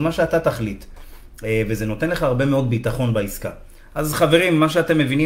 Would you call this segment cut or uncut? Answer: uncut